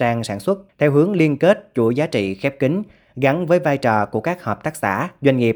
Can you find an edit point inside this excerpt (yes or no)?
no